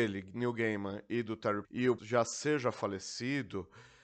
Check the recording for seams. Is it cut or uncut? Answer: cut